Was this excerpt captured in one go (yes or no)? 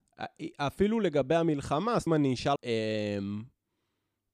no